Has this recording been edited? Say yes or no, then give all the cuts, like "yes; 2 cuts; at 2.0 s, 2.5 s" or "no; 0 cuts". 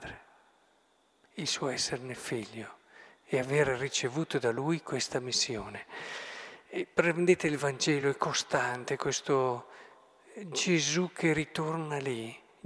no; 0 cuts